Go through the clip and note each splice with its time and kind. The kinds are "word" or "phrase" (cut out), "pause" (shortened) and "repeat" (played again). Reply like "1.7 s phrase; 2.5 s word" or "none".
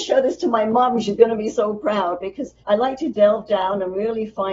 2.6 s pause